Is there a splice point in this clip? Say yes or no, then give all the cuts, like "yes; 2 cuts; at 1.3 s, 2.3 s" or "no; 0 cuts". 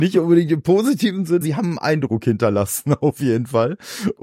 yes; 1 cut; at 1.4 s